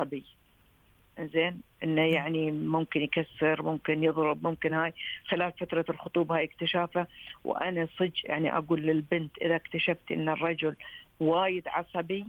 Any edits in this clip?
no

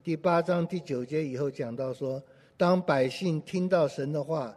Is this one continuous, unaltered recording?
yes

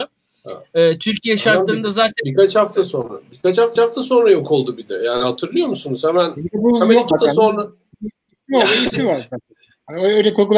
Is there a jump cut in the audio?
yes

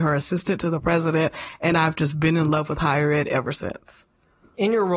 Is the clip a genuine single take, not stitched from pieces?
yes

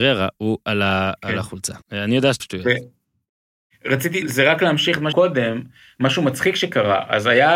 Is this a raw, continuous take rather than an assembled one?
no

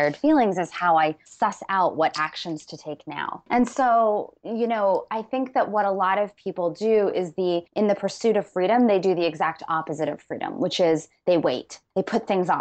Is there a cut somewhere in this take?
yes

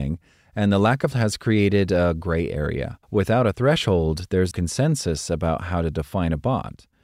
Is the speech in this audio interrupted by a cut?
yes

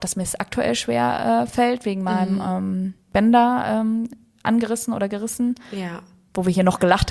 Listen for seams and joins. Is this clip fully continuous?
yes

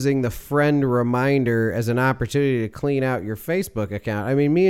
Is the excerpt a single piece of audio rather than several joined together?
yes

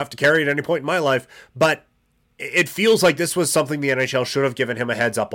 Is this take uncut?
yes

